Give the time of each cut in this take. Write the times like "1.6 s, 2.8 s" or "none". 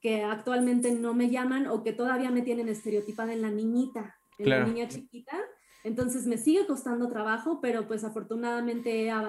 none